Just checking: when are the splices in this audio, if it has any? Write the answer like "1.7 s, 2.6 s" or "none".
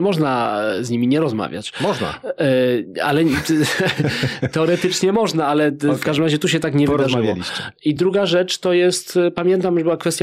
none